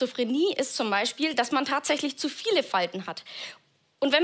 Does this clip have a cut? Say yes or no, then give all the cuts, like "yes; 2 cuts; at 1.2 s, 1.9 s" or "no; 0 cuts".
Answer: no; 0 cuts